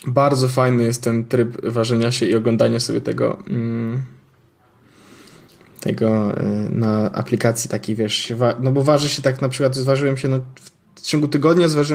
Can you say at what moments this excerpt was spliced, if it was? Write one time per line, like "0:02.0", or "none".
none